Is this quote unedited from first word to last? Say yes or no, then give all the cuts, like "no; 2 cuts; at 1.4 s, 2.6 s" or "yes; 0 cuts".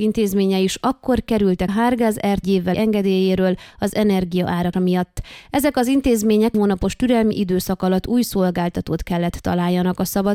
no; 5 cuts; at 1.7 s, 2.4 s, 2.7 s, 4.7 s, 6.5 s